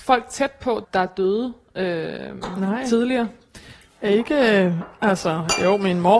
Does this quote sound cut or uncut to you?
uncut